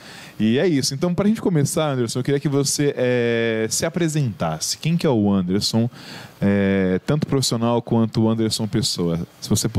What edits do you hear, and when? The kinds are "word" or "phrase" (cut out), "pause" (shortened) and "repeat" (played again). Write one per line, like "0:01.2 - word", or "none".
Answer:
none